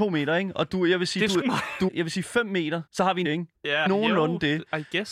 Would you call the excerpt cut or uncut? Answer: cut